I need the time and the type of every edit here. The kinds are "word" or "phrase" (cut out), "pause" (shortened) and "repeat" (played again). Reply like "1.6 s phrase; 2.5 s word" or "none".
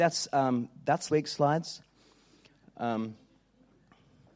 1.1 s word

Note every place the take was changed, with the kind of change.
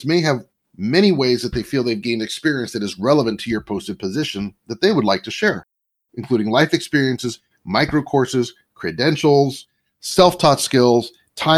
none

